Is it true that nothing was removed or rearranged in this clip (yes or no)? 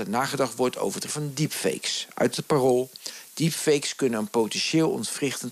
no